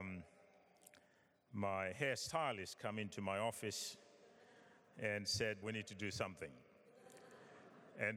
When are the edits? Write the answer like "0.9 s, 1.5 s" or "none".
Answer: 5.6 s